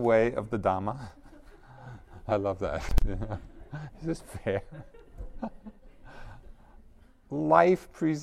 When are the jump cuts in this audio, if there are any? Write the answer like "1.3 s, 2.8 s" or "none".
none